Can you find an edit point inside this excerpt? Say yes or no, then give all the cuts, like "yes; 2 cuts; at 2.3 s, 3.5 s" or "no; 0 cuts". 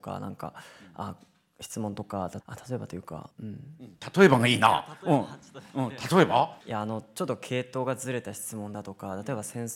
yes; 3 cuts; at 2.4 s, 3.3 s, 6.6 s